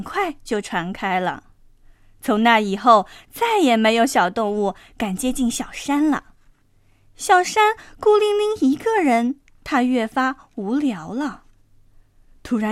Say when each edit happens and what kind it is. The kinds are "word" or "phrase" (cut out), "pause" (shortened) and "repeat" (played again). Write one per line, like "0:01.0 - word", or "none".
none

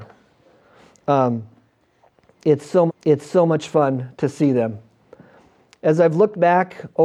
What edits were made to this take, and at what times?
0:02.9 - repeat

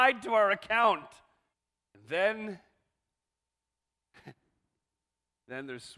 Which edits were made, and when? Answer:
0:01.5 - pause

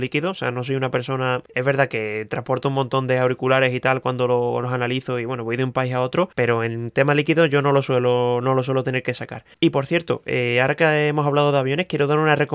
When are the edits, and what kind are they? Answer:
0:01.5 - pause
0:06.3 - pause
0:09.5 - pause

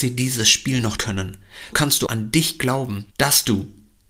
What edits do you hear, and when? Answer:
0:01.0 - word
0:01.7 - word
0:02.1 - word
0:03.1 - pause

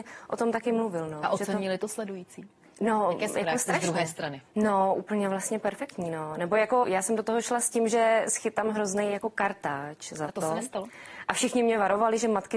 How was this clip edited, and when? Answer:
0:06.8 - word

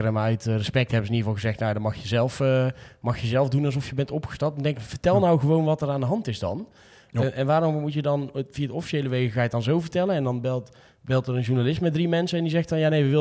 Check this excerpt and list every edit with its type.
0:04.7 - phrase

